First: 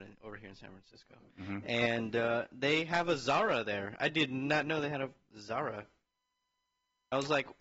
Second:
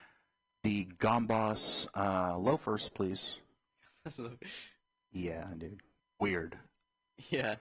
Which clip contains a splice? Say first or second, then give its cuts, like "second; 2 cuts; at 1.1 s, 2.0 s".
second; 1 cut; at 6.0 s